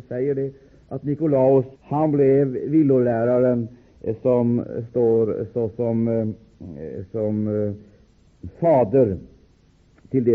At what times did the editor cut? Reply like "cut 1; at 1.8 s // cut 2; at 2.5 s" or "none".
cut 1; at 1.8 s

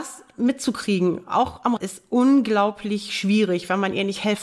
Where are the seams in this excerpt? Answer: cut 1; at 1.8 s

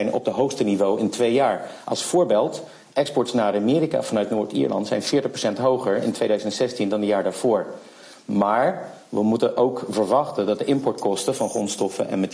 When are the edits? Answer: none

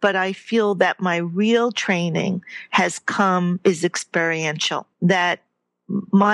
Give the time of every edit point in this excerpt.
cut 1; at 4.9 s

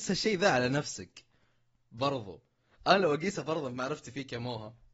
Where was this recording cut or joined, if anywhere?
none

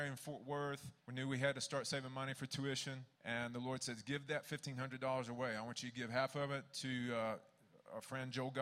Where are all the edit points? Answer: cut 1; at 1.0 s // cut 2; at 3.1 s

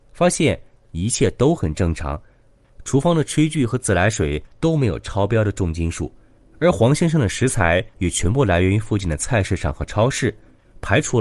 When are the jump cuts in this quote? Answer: none

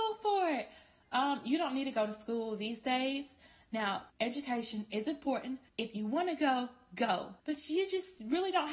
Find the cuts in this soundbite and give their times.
cut 1; at 4.1 s // cut 2; at 5.7 s // cut 3; at 7.4 s

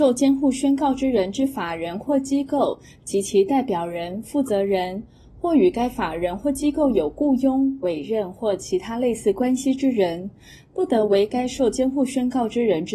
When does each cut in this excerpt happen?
none

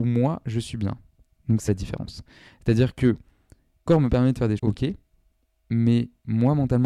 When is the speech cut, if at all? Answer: cut 1; at 1.7 s // cut 2; at 3.9 s // cut 3; at 4.6 s

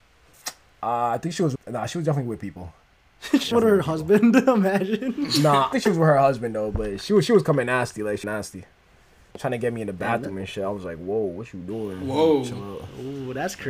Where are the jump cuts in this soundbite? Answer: cut 1; at 1.6 s // cut 2; at 2.8 s // cut 3; at 3.5 s // cut 4; at 5.7 s // cut 5; at 8.2 s

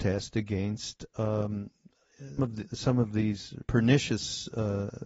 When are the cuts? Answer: cut 1; at 2.4 s // cut 2; at 3.6 s

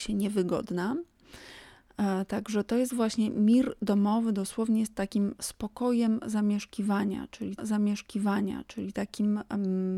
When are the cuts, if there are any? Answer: cut 1; at 7.6 s

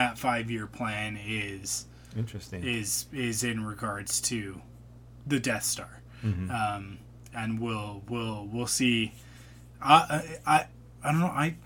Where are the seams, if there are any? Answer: none

